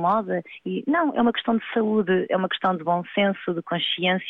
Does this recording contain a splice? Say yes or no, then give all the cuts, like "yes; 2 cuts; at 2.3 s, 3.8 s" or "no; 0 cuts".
no; 0 cuts